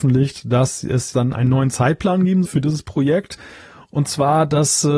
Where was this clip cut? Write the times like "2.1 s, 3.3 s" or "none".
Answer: 1.1 s, 2.5 s